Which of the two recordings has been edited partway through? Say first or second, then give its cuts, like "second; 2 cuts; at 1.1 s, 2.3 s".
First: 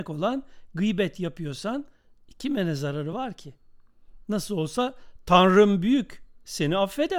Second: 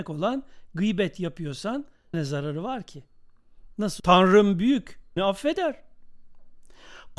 second; 3 cuts; at 2.1 s, 4.0 s, 5.2 s